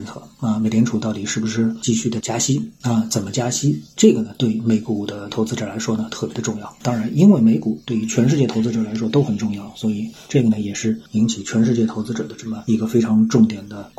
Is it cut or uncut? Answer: cut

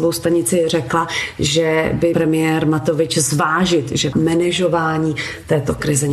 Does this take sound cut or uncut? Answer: cut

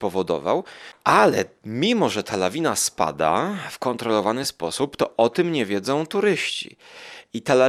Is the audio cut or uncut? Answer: uncut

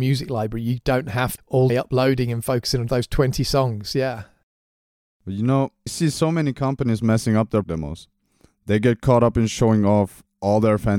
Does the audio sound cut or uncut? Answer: cut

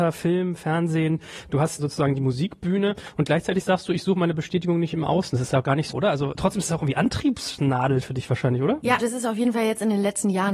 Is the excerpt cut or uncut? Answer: cut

